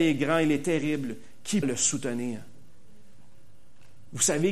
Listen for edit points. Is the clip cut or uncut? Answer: cut